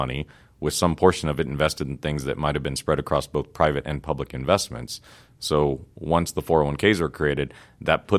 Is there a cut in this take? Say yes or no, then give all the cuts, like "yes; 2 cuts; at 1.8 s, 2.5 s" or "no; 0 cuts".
no; 0 cuts